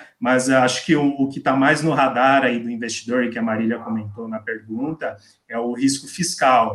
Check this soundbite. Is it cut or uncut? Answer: uncut